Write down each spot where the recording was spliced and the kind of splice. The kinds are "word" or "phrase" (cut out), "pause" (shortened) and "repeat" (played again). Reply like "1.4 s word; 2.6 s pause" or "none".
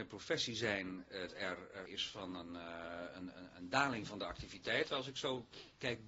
1.3 s word; 1.9 s word